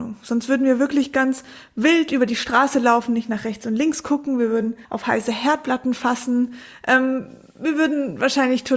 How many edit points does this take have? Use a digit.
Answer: 1